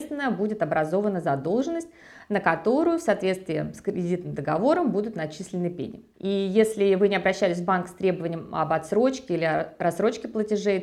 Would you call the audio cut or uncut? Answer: uncut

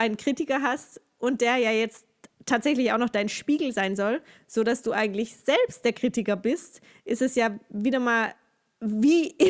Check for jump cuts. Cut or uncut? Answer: uncut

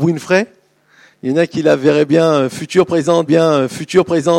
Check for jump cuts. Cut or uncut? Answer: cut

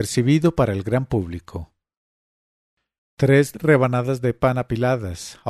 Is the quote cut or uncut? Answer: uncut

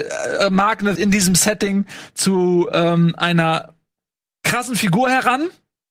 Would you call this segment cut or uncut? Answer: cut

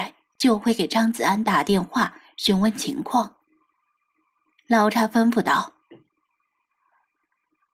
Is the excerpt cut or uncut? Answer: uncut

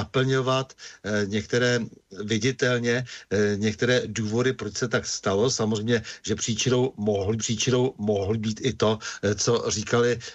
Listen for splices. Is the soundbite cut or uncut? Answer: cut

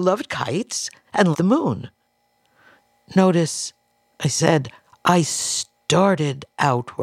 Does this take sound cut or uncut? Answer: cut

